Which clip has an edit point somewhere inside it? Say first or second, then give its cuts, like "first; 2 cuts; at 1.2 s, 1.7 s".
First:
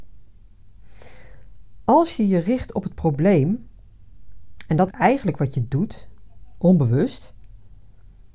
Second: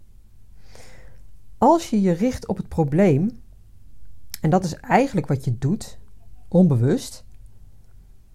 first; 1 cut; at 4.9 s